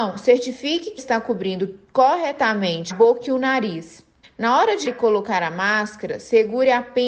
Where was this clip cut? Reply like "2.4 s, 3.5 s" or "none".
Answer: 1.0 s, 2.9 s, 4.2 s, 4.9 s